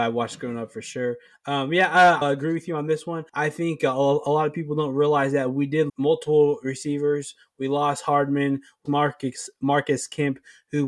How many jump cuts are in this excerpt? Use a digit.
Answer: 4